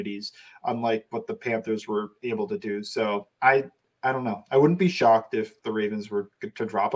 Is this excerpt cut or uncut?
cut